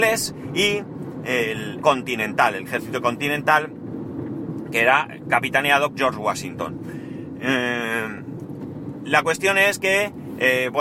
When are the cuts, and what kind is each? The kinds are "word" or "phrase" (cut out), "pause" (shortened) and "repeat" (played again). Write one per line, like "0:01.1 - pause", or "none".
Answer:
0:01.8 - word
0:02.7 - phrase
0:05.9 - word